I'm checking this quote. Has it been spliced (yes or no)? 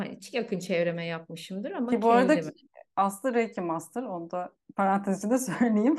no